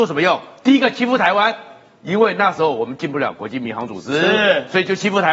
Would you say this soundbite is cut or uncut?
uncut